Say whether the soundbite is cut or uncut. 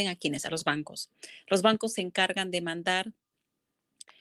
uncut